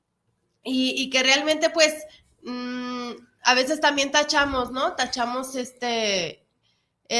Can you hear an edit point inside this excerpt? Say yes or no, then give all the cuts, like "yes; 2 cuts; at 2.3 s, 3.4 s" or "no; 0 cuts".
no; 0 cuts